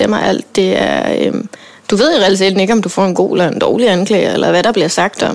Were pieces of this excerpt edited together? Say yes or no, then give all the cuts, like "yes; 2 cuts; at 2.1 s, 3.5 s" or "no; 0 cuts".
no; 0 cuts